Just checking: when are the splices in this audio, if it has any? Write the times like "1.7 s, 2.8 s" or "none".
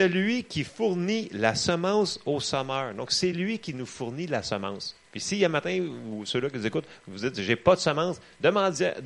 none